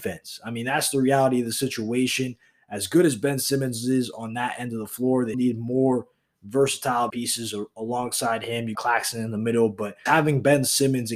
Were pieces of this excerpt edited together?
yes; 4 cuts; at 5.3 s, 7.1 s, 8.7 s, 10.1 s

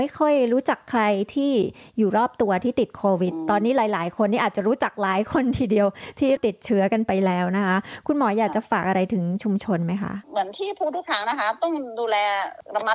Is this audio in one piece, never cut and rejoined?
no; 1 cut; at 10.2 s

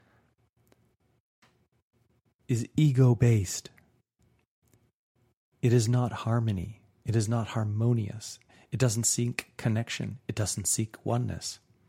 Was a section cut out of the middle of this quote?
no; 0 cuts

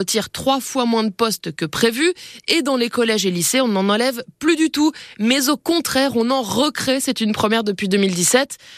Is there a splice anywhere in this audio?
no; 0 cuts

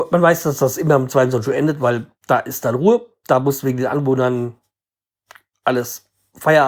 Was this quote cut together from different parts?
no; 0 cuts

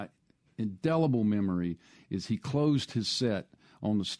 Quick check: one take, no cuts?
yes; 0 cuts

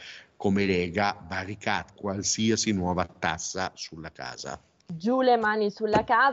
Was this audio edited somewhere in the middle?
yes; 1 cut; at 1.9 s

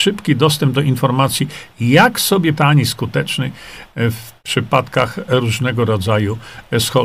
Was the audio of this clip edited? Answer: yes; 1 cut; at 2.5 s

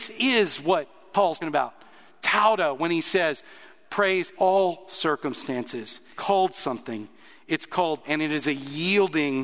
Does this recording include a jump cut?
yes; 4 cuts; at 1.4 s, 4.3 s, 6.1 s, 8.0 s

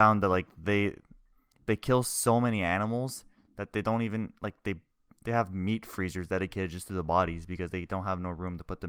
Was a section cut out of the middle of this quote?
no; 0 cuts

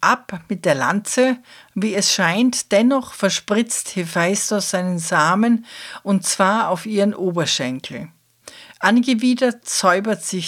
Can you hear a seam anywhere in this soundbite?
no; 0 cuts

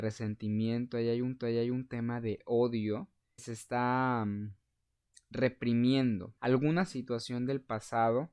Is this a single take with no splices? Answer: no; 3 cuts; at 1.4 s, 3.4 s, 6.4 s

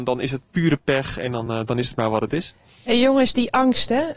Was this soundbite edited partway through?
no; 0 cuts

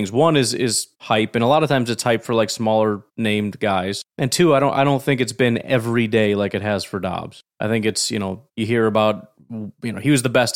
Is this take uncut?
no; 4 cuts; at 0.9 s, 3.1 s, 4.1 s, 8.5 s

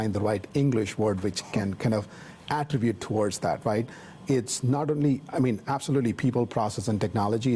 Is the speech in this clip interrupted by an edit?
no; 0 cuts

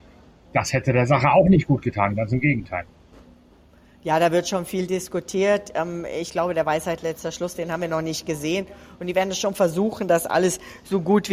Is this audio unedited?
yes; 0 cuts

